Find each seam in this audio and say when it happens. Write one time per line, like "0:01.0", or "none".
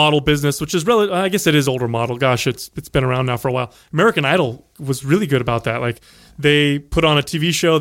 none